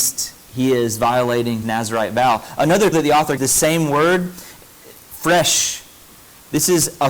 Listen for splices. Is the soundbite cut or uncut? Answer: cut